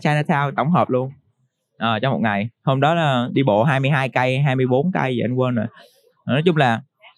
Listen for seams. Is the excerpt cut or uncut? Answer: uncut